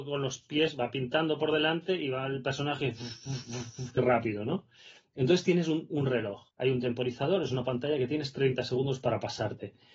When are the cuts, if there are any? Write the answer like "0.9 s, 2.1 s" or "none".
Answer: 4.0 s, 6.5 s